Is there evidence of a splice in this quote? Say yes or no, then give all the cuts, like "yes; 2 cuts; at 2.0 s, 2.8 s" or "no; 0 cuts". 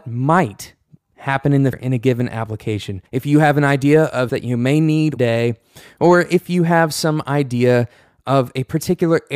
yes; 4 cuts; at 1.7 s, 3.1 s, 4.3 s, 5.2 s